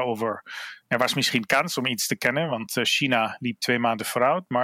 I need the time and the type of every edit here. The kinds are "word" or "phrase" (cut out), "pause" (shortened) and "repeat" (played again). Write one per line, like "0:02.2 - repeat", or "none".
none